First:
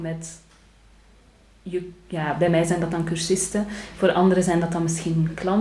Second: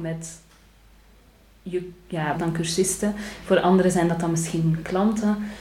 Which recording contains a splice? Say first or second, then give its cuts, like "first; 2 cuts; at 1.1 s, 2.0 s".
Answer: second; 1 cut; at 2.3 s